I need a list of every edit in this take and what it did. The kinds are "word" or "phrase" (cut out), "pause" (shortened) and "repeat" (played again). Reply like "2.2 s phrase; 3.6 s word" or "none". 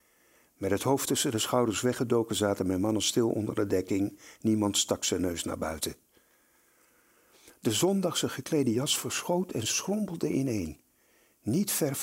none